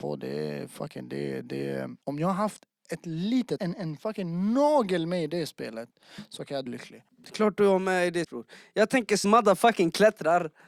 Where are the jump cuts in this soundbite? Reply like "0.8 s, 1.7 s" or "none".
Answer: 2.0 s, 3.6 s, 6.7 s, 7.1 s, 8.2 s, 9.2 s

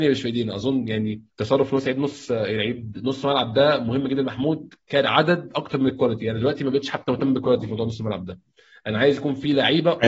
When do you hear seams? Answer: 1.3 s

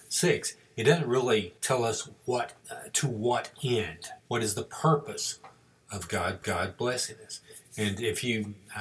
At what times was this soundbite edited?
1.6 s, 2.6 s, 4.2 s, 6.4 s

